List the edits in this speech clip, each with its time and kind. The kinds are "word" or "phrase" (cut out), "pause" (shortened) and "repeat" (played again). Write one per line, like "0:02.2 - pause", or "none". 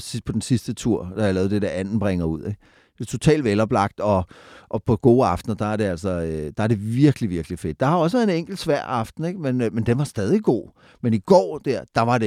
none